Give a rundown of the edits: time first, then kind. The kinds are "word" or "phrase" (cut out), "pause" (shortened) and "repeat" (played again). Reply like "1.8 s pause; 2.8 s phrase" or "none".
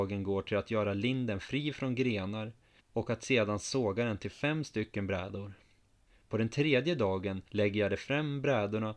2.8 s pause; 7.5 s pause